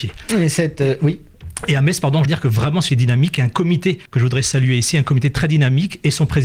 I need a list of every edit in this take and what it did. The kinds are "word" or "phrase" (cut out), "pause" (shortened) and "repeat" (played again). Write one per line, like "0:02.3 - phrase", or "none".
0:02.3 - phrase
0:02.9 - phrase
0:04.1 - pause